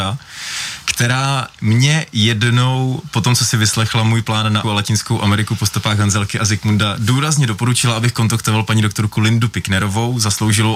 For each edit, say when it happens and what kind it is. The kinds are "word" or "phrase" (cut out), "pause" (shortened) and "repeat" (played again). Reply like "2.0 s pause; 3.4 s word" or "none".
4.6 s word